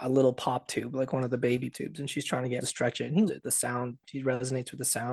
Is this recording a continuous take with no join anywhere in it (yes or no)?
no